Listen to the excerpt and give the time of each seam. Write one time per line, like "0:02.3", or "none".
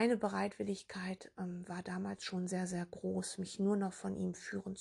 none